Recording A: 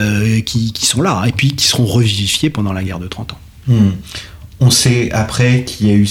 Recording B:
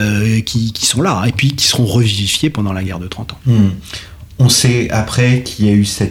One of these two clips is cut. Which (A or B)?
B